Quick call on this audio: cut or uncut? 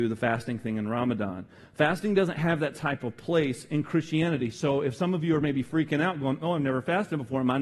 uncut